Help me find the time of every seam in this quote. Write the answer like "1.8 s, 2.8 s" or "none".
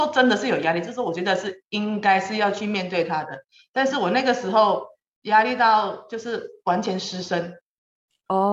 none